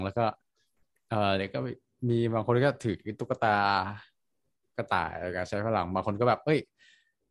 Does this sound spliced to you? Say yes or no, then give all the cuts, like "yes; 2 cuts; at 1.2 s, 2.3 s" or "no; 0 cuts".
no; 0 cuts